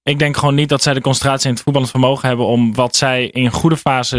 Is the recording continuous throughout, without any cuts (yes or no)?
yes